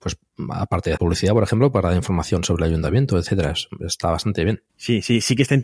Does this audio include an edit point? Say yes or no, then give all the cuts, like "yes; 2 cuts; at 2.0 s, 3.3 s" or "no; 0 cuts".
yes; 2 cuts; at 1.0 s, 4.7 s